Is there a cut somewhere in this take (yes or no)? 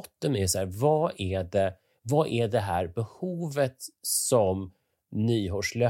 no